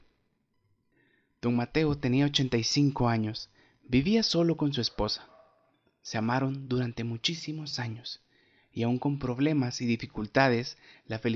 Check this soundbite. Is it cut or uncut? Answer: uncut